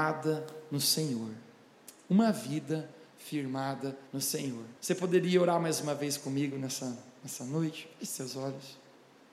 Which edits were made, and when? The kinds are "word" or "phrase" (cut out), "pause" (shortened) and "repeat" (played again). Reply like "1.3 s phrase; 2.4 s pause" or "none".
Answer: 4.1 s pause; 4.8 s pause